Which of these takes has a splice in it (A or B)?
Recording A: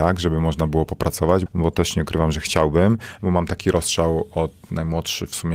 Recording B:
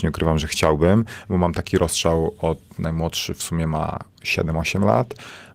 A